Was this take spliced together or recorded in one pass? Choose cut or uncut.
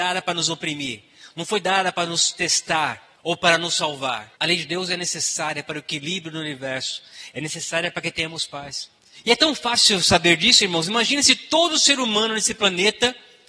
cut